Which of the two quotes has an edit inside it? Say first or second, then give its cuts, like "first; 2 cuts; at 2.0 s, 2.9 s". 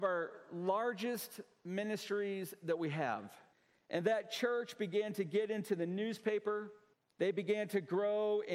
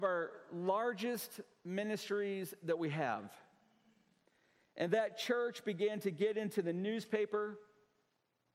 first; 2 cuts; at 3.5 s, 6.9 s